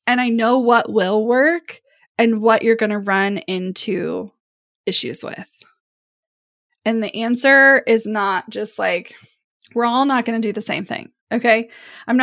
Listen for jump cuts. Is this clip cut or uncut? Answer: uncut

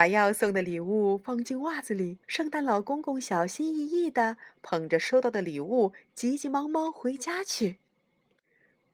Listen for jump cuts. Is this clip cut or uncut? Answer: cut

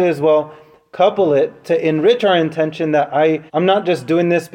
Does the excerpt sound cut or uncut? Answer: cut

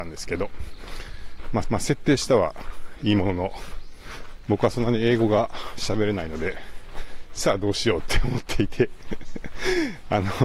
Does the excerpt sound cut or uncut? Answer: cut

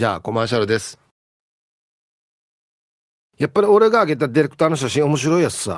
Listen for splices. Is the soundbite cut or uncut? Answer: uncut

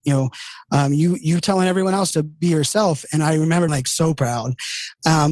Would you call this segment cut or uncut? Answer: cut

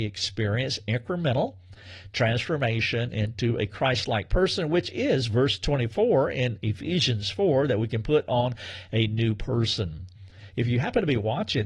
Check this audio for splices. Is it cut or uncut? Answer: uncut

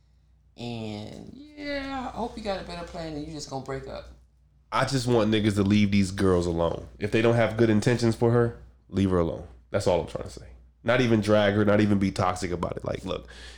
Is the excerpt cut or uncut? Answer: uncut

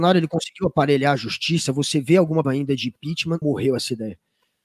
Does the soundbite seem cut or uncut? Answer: cut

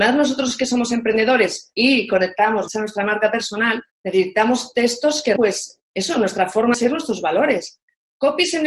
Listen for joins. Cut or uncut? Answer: cut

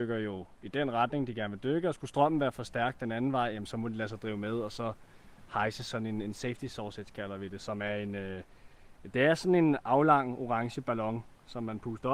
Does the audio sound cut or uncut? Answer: uncut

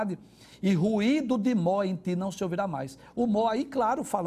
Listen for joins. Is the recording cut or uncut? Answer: uncut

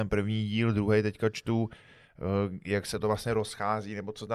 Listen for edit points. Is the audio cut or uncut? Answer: uncut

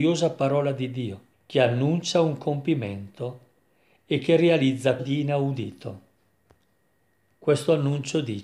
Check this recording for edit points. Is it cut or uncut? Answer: cut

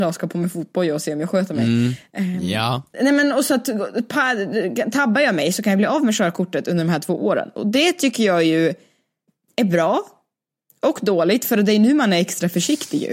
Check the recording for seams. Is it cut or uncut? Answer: uncut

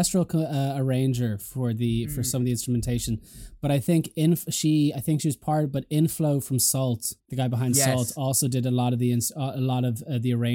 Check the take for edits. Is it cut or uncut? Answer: cut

